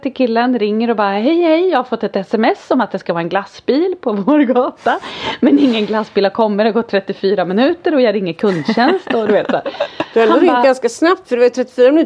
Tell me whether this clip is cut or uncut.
uncut